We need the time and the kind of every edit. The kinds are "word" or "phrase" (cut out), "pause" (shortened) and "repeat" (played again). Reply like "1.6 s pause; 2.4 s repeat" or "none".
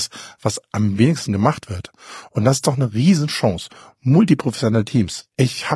none